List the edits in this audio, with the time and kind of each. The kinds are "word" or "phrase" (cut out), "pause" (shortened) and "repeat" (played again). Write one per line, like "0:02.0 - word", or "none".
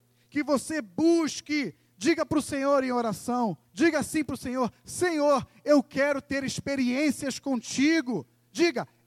0:03.7 - pause